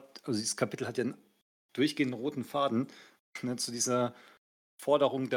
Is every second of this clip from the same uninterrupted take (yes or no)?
yes